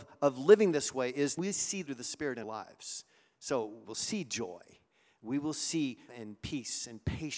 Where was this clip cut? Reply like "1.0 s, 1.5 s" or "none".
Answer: 1.4 s, 1.9 s, 2.4 s, 3.8 s, 6.1 s